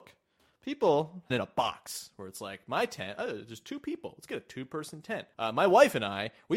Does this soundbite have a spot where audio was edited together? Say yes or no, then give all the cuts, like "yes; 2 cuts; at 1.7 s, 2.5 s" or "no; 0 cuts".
yes; 2 cuts; at 1.3 s, 5.3 s